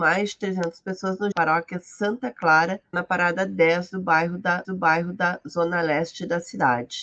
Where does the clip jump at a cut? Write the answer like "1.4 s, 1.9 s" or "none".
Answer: 1.3 s, 2.9 s, 4.6 s

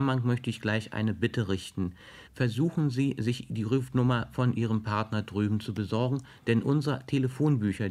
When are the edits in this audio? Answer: 2.3 s

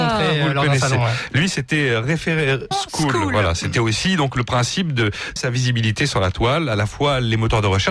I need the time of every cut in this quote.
2.7 s, 5.4 s

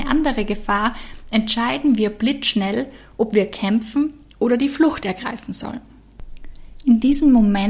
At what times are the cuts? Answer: none

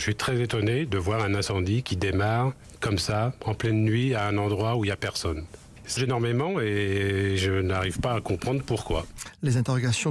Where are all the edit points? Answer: 6.0 s

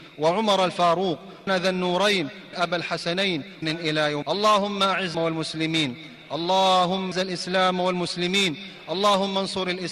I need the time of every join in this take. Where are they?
1.5 s, 2.5 s, 3.6 s, 4.2 s, 5.1 s, 7.1 s

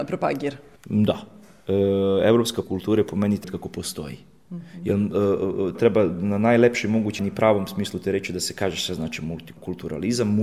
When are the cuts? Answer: 2.6 s, 3.4 s, 5.7 s, 7.2 s

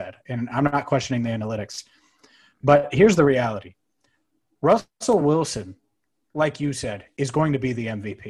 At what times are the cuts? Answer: none

